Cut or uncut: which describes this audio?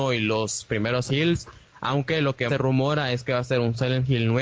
cut